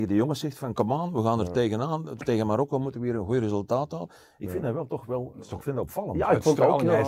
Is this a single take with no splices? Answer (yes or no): yes